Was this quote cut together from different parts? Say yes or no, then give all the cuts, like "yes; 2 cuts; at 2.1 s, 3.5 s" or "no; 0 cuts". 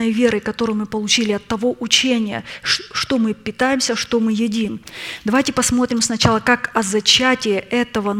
no; 0 cuts